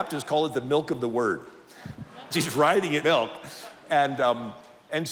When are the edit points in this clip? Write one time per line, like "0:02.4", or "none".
0:02.3
0:03.0

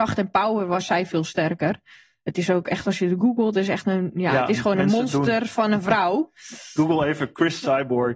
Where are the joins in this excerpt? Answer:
none

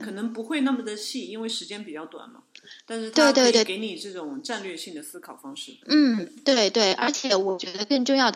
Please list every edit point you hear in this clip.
0:05.8

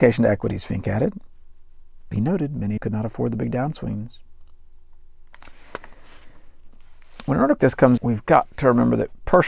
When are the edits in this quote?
0:02.1
0:02.8
0:07.6
0:08.0

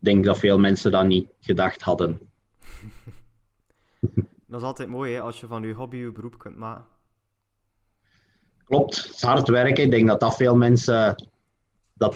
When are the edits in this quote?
none

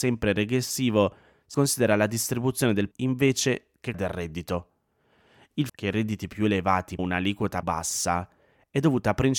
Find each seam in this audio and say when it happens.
0:01.5
0:02.9
0:03.9
0:05.7
0:07.0
0:07.6

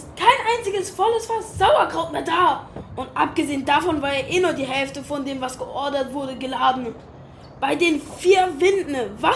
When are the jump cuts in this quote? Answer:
none

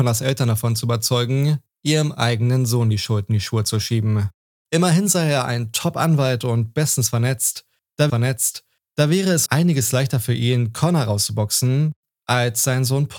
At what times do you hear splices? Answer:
0:08.1
0:09.5

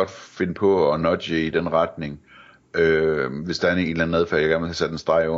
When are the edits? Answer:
none

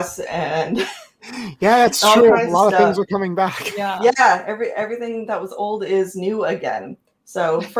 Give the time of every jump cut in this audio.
none

